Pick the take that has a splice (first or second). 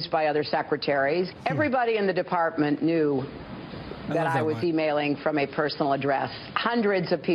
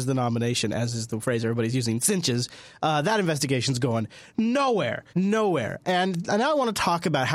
second